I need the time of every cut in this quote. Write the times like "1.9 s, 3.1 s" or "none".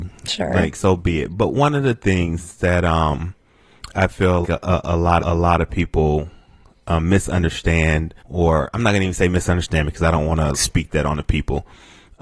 4.4 s, 5.2 s, 8.2 s, 10.5 s

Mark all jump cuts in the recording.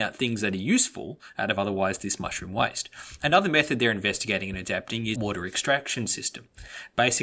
5.1 s

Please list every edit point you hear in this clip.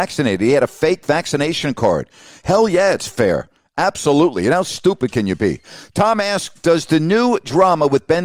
none

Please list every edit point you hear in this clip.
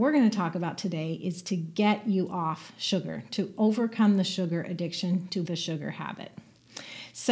5.4 s

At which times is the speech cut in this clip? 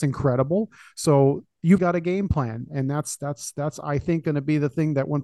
1.8 s

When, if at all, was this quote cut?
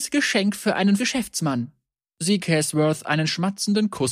1.0 s, 2.4 s

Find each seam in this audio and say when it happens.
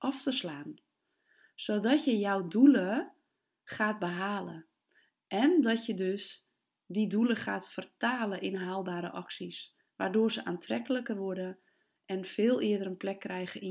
9.8 s

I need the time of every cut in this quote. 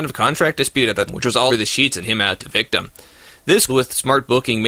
1.1 s, 1.5 s, 2.0 s, 2.4 s, 3.7 s

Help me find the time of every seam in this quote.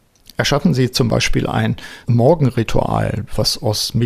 2.0 s

